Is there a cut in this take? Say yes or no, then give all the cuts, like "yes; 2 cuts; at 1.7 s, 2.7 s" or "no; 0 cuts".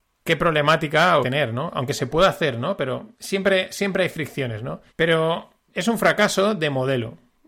yes; 3 cuts; at 1.2 s, 3.1 s, 4.9 s